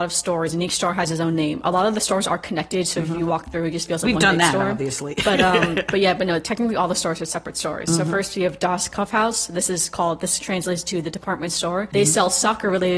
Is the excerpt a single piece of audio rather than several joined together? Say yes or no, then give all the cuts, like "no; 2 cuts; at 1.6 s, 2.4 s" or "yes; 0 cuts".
yes; 0 cuts